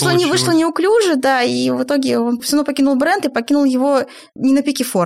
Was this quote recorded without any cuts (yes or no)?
yes